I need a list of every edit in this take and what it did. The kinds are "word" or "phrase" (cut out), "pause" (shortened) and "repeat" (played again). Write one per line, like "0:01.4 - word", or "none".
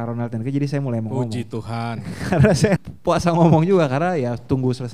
0:02.8 - word